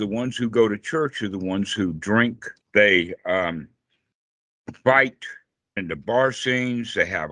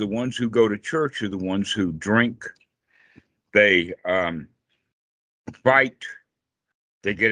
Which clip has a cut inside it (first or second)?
first